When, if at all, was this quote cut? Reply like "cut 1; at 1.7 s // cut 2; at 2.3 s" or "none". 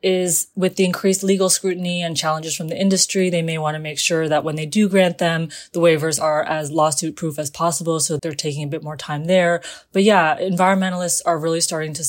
cut 1; at 8.2 s